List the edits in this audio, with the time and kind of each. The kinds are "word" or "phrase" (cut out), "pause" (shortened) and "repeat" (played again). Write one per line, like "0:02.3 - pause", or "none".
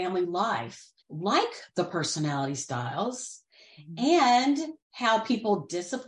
0:01.0 - pause
0:04.8 - pause